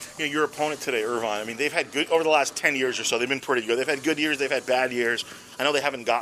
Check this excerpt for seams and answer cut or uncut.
uncut